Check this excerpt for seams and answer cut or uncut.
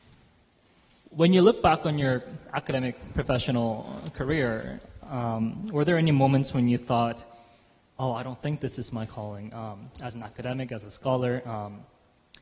uncut